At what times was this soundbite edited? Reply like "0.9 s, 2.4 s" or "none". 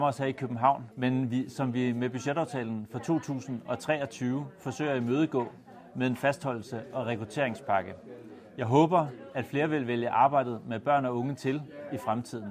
0.9 s